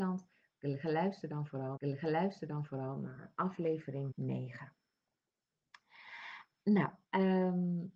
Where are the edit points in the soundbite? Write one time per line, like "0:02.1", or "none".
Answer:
0:01.8
0:04.1
0:07.0